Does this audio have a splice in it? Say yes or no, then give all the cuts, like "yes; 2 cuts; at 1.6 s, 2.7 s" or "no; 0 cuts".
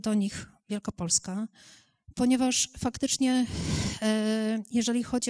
no; 0 cuts